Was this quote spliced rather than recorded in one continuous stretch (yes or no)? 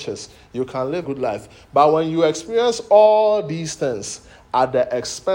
yes